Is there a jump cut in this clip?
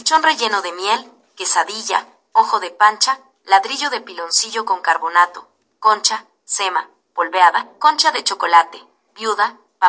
no; 0 cuts

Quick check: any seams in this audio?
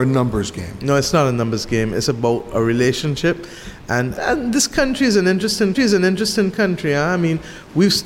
yes; 2 cuts; at 4.2 s, 5.7 s

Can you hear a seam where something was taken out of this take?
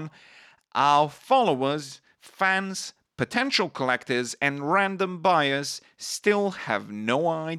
no; 0 cuts

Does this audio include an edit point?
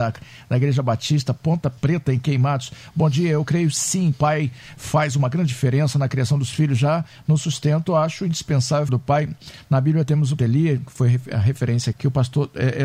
yes; 5 cuts; at 1.8 s, 4.1 s, 8.9 s, 10.4 s, 11.9 s

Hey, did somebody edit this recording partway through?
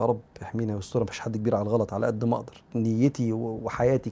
yes; 1 cut; at 1.1 s

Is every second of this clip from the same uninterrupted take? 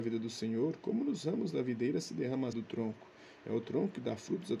no; 1 cut; at 2.5 s

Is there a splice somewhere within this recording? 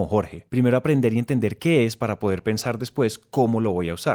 no; 0 cuts

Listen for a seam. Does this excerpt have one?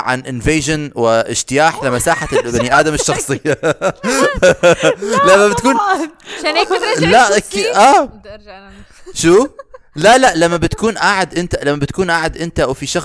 no; 0 cuts

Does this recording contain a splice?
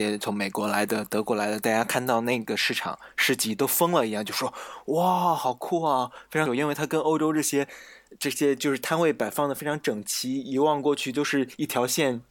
yes; 1 cut; at 6.5 s

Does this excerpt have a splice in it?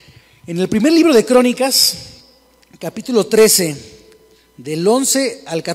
no; 0 cuts

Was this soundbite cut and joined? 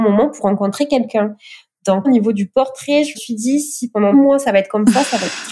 yes; 3 cuts; at 2.0 s, 3.1 s, 4.1 s

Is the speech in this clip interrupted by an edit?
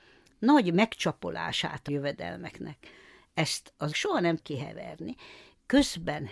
yes; 3 cuts; at 1.9 s, 3.9 s, 4.4 s

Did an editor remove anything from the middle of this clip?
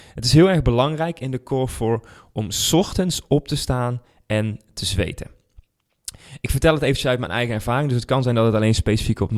no; 0 cuts

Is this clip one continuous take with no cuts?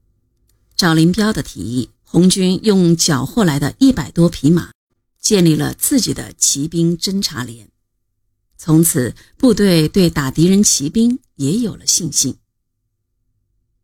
no; 1 cut; at 1.9 s

